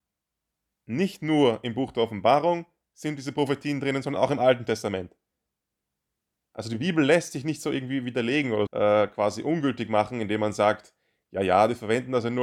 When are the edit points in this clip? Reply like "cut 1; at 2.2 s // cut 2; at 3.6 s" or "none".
cut 1; at 8.7 s